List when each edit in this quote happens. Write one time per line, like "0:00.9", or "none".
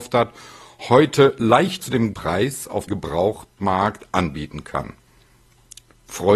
0:01.8
0:02.1
0:02.9